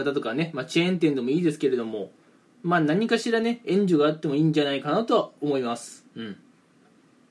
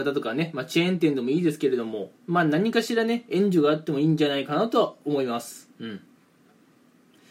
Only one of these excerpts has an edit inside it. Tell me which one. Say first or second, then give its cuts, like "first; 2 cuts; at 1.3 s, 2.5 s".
second; 1 cut; at 2.2 s